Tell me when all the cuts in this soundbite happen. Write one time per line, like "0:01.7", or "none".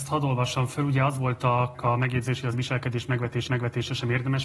0:01.7
0:02.5
0:03.5